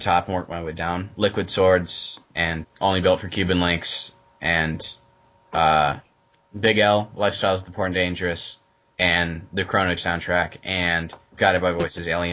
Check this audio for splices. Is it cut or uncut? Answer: cut